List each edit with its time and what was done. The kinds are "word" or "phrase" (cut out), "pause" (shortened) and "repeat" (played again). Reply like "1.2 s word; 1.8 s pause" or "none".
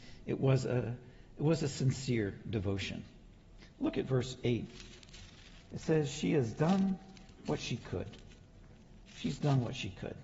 none